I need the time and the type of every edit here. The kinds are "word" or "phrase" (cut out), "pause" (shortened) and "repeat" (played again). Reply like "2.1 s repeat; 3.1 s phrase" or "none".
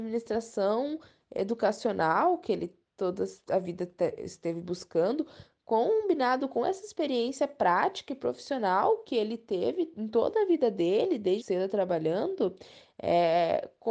11.4 s word